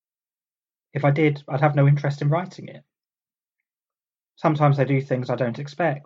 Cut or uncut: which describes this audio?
uncut